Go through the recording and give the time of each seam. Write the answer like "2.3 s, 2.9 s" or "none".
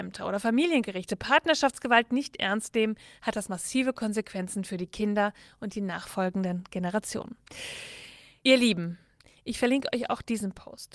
none